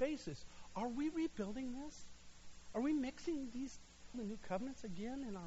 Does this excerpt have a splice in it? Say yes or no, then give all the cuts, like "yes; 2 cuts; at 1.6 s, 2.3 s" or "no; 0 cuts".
yes; 1 cut; at 4.1 s